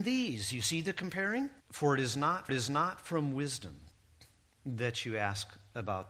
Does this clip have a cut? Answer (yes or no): yes